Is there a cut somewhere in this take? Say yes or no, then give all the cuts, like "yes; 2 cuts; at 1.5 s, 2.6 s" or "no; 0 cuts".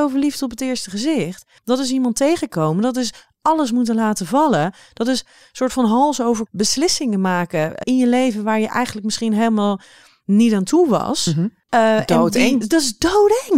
yes; 5 cuts; at 1.6 s, 6.5 s, 7.8 s, 11.6 s, 12.6 s